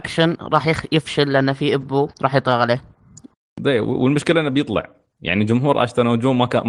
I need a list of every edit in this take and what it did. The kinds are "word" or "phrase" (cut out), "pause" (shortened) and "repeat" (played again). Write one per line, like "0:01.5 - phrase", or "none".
0:02.1 - pause